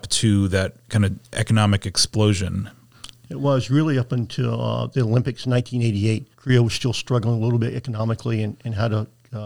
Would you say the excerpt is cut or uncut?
cut